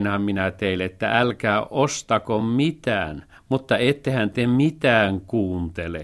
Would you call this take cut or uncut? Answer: uncut